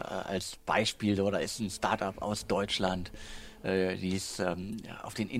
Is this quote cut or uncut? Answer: uncut